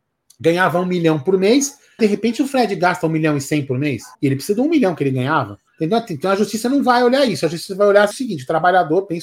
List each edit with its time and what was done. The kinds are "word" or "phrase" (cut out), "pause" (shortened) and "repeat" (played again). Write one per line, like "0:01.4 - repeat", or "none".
0:02.0 - word
0:04.1 - pause
0:05.7 - pause
0:08.1 - word